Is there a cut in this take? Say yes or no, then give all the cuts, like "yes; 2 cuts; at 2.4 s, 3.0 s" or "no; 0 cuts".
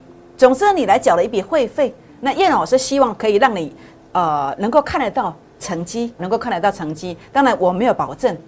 yes; 1 cut; at 6.2 s